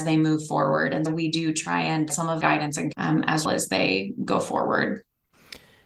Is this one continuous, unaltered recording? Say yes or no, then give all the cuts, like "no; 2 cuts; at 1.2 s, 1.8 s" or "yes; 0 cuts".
no; 5 cuts; at 1.1 s, 2.1 s, 2.4 s, 2.9 s, 3.5 s